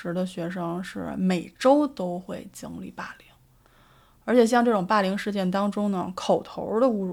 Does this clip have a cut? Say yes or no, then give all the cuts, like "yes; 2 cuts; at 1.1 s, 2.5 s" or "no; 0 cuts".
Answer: no; 0 cuts